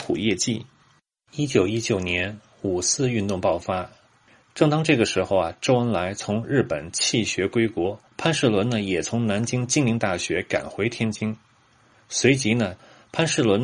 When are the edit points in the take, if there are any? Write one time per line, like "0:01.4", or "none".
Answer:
0:08.1